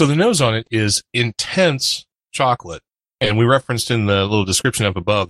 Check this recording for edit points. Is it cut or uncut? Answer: uncut